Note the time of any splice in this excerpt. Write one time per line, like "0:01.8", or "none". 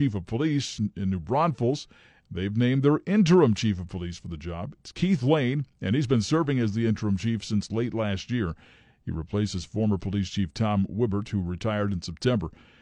none